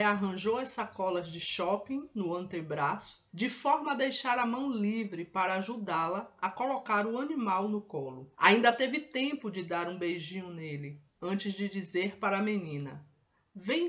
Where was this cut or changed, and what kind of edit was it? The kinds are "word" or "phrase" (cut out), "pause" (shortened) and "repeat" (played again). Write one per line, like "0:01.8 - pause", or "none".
0:03.3 - pause
0:08.3 - pause